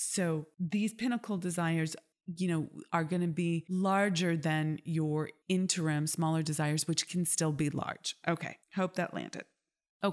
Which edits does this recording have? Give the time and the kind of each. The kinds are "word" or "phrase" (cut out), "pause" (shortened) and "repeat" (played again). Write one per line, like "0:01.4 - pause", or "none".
0:08.6 - pause

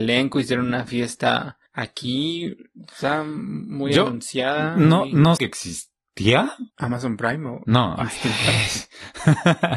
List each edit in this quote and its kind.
0:01.7 - pause
0:05.4 - word
0:06.7 - pause

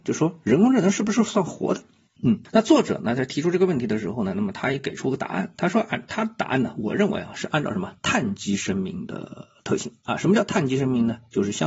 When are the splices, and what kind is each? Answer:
none

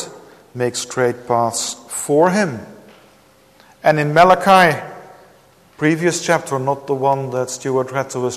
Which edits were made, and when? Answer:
none

